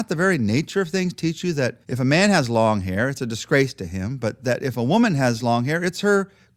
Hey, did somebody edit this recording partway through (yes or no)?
yes